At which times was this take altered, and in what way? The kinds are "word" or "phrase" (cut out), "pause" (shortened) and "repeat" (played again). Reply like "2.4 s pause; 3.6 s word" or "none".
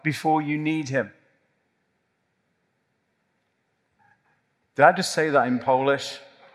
none